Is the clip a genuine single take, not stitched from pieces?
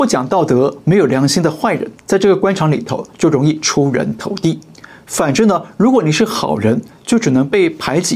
no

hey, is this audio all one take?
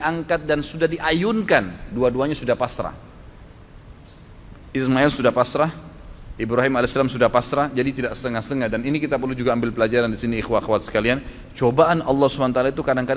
yes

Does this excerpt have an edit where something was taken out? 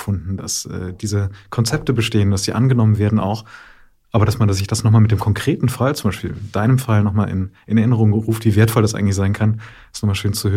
no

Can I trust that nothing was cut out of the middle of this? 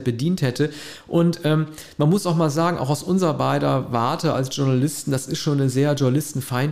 yes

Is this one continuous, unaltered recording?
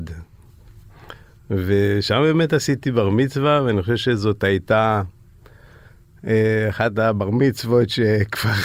yes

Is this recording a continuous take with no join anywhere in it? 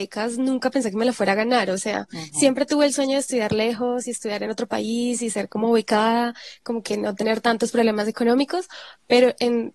yes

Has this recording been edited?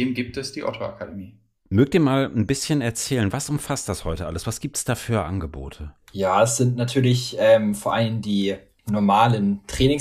no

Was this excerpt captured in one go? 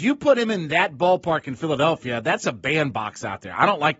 yes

